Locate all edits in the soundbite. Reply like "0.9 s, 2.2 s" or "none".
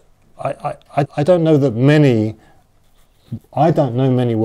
1.1 s